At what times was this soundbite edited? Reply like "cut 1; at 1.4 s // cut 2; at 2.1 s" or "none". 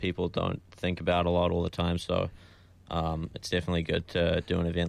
none